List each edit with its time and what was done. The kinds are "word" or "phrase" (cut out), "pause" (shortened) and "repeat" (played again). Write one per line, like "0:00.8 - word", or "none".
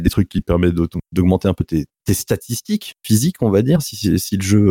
0:01.9 - pause